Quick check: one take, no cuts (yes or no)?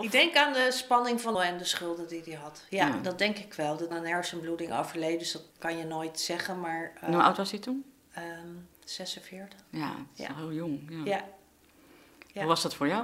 no